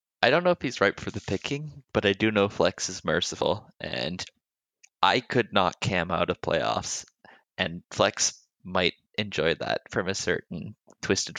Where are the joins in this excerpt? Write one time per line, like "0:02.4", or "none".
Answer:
none